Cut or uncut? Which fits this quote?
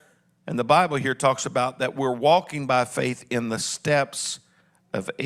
uncut